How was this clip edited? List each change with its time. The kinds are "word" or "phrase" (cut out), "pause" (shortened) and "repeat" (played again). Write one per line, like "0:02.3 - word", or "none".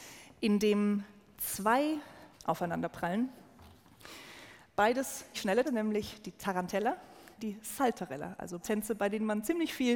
0:02.3 - word
0:05.3 - word
0:05.6 - word
0:07.4 - word
0:08.6 - word